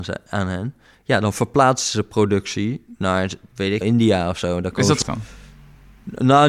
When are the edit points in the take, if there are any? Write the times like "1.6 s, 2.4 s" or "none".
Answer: 3.8 s, 5.0 s